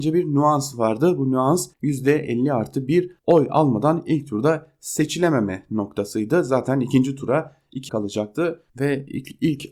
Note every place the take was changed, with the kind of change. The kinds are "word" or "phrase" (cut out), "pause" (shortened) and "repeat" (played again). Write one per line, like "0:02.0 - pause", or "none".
0:01.7 - pause
0:03.2 - pause
0:07.9 - word
0:08.7 - pause